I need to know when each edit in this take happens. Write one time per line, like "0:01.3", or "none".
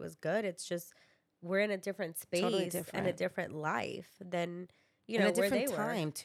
none